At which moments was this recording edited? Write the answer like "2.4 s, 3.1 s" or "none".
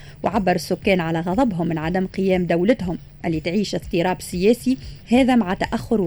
5.0 s

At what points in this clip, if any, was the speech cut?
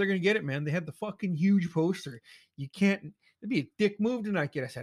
none

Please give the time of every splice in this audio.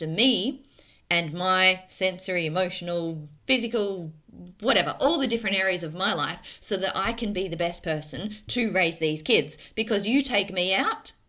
3.4 s

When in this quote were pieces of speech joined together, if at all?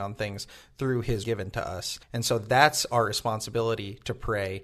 1.2 s, 2.0 s

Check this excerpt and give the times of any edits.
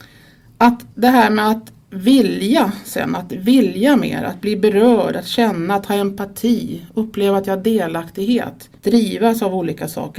0.9 s, 8.8 s

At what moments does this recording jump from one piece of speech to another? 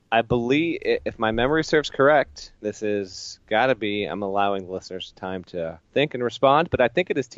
2.6 s, 5.9 s

